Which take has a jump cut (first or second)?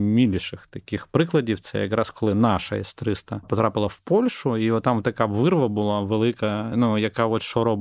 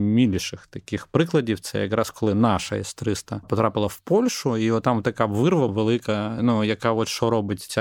second